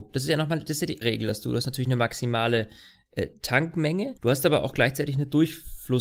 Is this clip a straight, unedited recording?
no; 2 cuts; at 1.0 s, 4.2 s

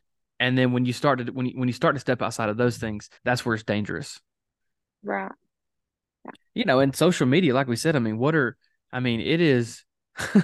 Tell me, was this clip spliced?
yes; 1 cut; at 3.2 s

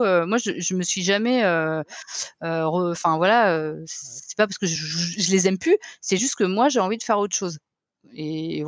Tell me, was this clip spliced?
no; 0 cuts

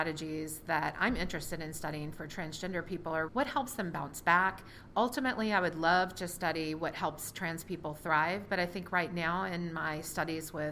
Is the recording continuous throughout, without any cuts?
no; 1 cut; at 3.3 s

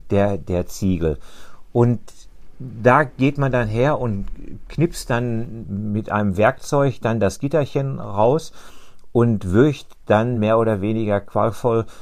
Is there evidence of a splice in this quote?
no; 0 cuts

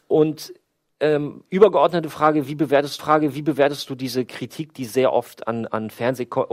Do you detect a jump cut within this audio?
yes; 1 cut; at 3.0 s

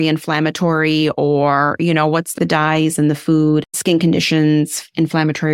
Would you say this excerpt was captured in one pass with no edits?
no; 2 cuts; at 2.4 s, 3.7 s

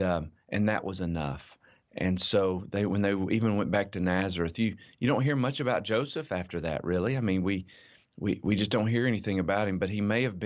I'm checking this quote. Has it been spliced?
no; 0 cuts

